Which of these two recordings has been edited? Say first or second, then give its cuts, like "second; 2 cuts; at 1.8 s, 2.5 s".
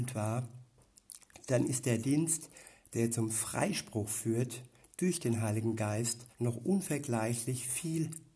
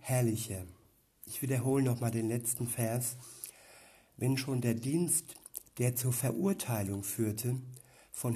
first; 1 cut; at 6.3 s